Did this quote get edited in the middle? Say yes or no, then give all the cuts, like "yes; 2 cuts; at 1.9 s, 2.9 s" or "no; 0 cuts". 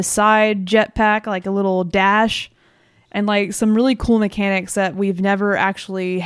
no; 0 cuts